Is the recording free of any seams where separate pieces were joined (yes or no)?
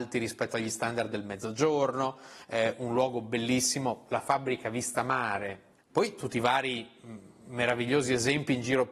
yes